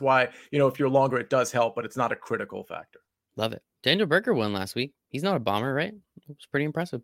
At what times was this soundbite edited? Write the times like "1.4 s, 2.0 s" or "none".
none